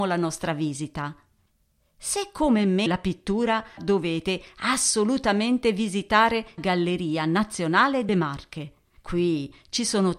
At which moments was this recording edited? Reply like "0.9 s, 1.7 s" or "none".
2.9 s, 3.8 s, 6.6 s, 8.1 s